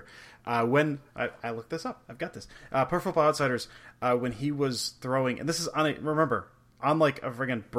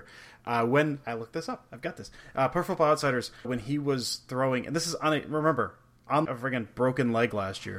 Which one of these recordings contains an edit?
second; 3 cuts; at 1.0 s, 3.4 s, 6.2 s

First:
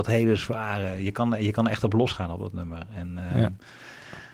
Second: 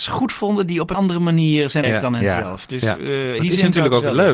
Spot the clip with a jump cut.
second; 3 cuts; at 0.9 s, 1.8 s, 3.4 s

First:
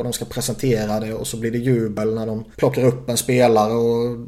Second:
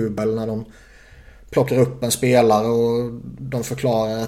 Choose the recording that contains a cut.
first; 1 cut; at 2.5 s

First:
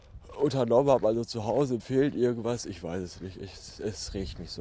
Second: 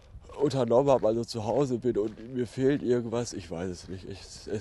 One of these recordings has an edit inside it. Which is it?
first; 1 cut; at 1.8 s

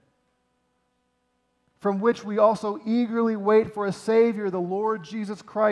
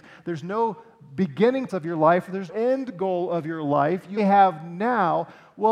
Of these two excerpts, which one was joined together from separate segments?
second; 3 cuts; at 1.7 s, 2.5 s, 4.2 s

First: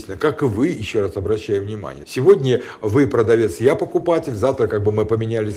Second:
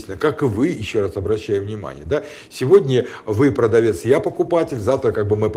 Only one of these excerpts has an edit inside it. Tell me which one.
first; 1 cut; at 2.0 s

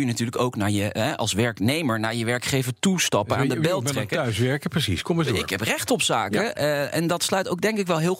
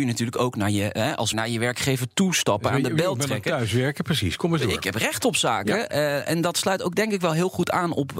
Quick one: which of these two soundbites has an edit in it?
second; 1 cut; at 1.3 s

